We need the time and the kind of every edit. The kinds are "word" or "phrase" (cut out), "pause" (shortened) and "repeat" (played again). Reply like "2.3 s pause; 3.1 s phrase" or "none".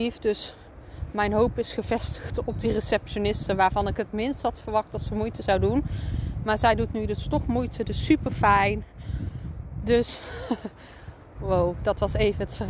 none